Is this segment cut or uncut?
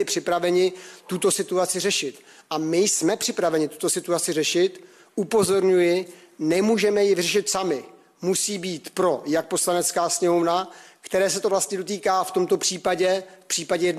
uncut